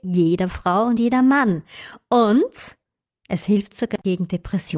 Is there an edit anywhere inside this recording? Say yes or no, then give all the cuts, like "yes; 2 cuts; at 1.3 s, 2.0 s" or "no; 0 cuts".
no; 0 cuts